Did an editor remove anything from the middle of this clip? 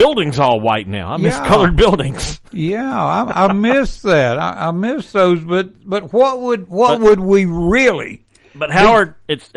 no; 0 cuts

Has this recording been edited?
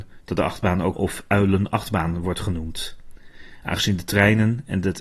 yes; 1 cut; at 0.9 s

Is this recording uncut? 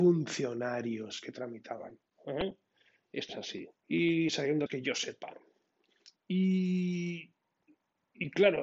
no; 4 cuts; at 3.3 s, 3.8 s, 4.7 s, 6.2 s

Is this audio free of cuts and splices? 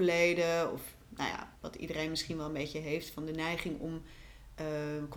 no; 1 cut; at 1.6 s

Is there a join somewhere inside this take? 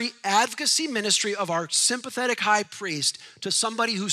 no; 0 cuts

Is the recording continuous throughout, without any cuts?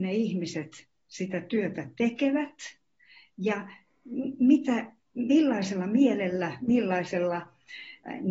yes; 0 cuts

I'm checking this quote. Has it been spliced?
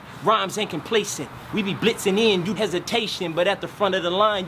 yes; 1 cut; at 2.6 s

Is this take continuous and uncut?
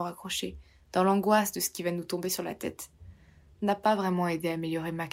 yes; 0 cuts

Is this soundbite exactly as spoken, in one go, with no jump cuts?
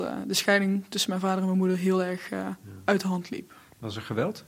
yes; 0 cuts

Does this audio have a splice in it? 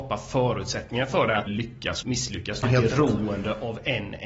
yes; 3 cuts; at 1.5 s, 2.0 s, 2.6 s

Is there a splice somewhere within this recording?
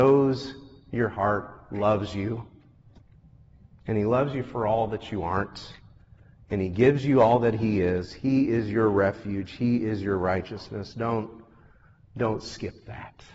no; 0 cuts

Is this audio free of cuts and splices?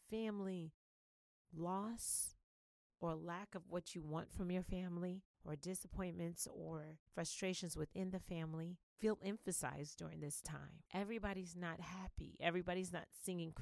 no; 3 cuts; at 5.3 s, 7.1 s, 10.9 s

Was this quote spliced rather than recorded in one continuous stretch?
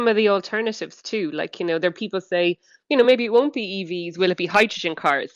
no; 0 cuts

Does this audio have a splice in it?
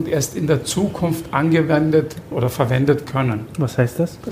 yes; 2 cuts; at 2.3 s, 3.0 s

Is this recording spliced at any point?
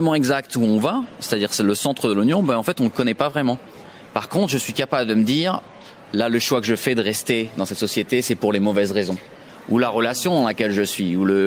no; 0 cuts

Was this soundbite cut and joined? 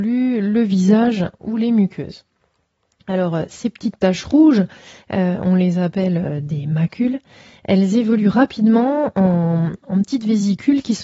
no; 0 cuts

